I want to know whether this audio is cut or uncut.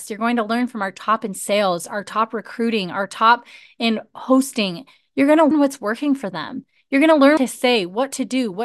cut